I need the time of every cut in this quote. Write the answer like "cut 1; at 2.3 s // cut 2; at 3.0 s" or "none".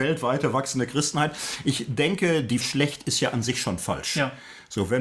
cut 1; at 2.6 s